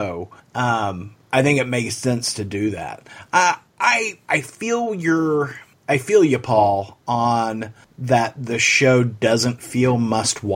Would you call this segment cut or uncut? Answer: uncut